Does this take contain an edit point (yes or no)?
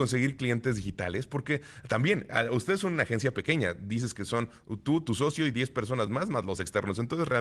no